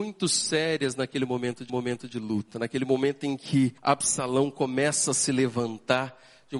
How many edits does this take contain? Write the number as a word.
two